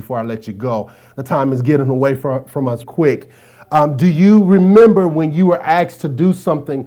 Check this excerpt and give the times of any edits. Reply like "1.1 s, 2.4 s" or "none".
2.8 s

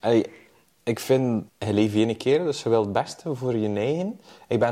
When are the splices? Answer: none

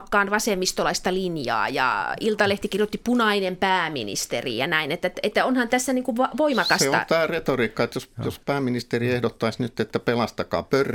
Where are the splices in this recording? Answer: 8.4 s

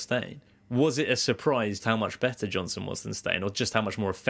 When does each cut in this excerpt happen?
1.8 s

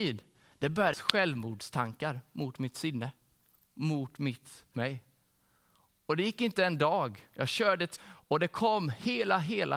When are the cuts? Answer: 0.9 s, 4.7 s, 8.0 s

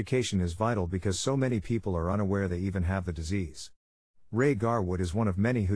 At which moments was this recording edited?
none

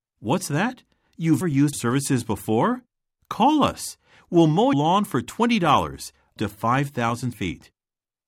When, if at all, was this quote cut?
1.4 s, 1.7 s, 4.7 s, 6.4 s, 7.3 s

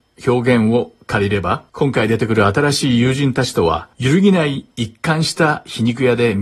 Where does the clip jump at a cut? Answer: 1.7 s, 3.9 s

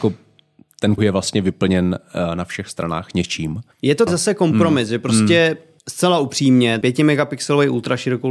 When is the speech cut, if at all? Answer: 1.0 s, 3.7 s, 4.1 s, 5.8 s, 6.8 s

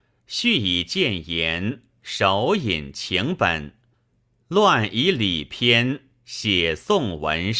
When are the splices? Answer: none

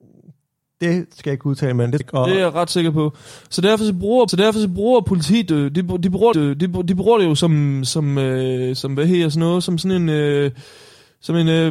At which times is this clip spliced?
2.0 s, 4.3 s, 6.3 s

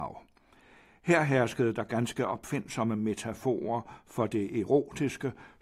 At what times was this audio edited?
none

